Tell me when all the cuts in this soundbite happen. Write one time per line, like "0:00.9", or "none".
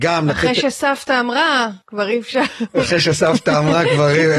0:01.8